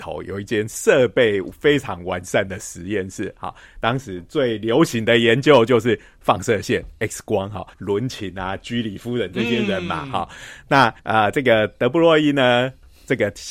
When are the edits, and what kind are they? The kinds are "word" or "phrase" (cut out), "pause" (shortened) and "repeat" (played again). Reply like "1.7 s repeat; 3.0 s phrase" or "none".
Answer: 7.7 s pause; 11.0 s pause